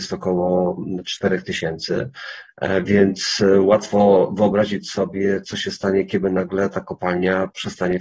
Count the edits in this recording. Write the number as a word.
zero